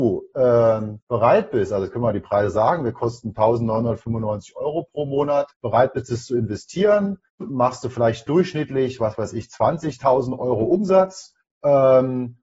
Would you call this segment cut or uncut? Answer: cut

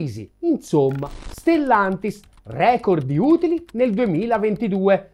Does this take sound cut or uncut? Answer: uncut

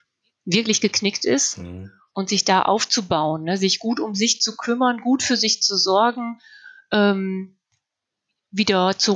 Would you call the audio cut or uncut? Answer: uncut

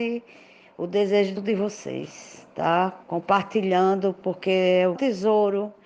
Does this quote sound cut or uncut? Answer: cut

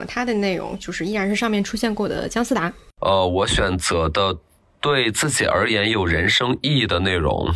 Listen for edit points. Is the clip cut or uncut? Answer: uncut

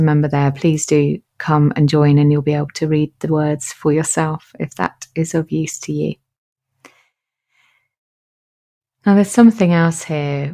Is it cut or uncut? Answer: uncut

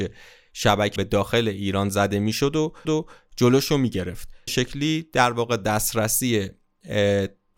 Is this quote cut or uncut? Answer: cut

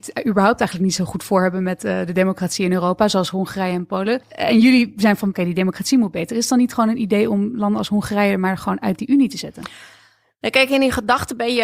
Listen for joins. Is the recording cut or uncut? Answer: cut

